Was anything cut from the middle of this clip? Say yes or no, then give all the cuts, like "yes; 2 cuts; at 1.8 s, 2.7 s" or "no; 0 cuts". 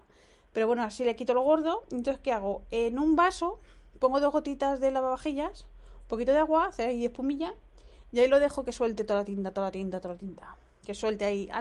no; 0 cuts